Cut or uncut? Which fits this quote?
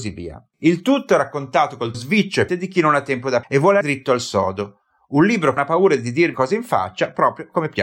cut